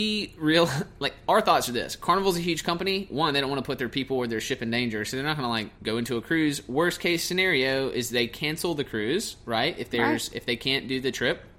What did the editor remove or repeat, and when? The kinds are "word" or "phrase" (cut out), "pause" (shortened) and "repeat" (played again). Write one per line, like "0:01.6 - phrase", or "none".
0:05.8 - pause